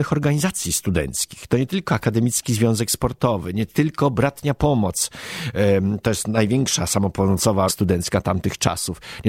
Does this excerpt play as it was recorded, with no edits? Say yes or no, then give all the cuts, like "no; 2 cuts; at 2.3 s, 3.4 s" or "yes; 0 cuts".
no; 1 cut; at 7.7 s